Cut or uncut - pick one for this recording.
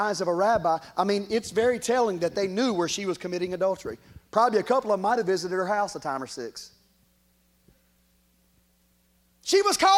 uncut